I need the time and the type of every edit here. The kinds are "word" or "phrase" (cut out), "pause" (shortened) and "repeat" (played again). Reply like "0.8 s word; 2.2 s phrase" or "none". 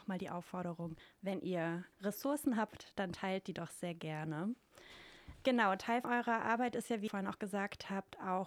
1.9 s pause; 6.0 s word; 7.1 s word